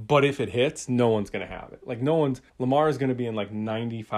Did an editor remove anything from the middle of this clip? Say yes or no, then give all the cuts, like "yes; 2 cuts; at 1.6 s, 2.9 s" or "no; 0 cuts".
yes; 1 cut; at 2.5 s